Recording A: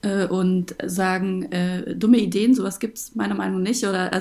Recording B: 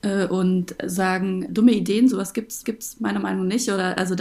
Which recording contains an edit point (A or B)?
B